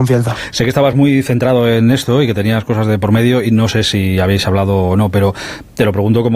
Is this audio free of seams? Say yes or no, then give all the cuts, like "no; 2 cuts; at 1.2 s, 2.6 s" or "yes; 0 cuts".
yes; 0 cuts